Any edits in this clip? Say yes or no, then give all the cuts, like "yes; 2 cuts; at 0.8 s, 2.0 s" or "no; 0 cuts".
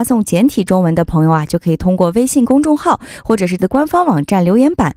yes; 1 cut; at 3.6 s